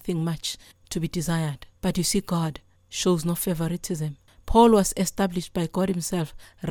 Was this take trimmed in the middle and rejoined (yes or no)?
yes